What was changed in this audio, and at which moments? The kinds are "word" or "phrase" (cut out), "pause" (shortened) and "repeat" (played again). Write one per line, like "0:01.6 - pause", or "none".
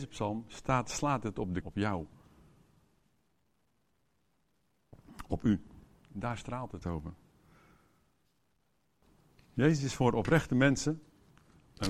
0:01.6 - word
0:06.8 - phrase